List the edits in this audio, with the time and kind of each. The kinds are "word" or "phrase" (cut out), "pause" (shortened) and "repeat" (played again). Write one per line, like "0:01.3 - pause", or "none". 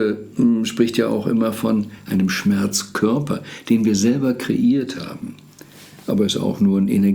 none